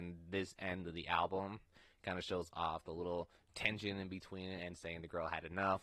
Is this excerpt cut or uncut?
uncut